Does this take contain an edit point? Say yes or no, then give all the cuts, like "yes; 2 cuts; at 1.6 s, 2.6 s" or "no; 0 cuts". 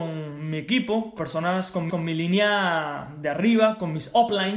yes; 2 cuts; at 1.2 s, 1.9 s